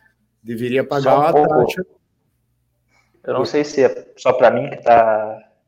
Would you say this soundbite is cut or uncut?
uncut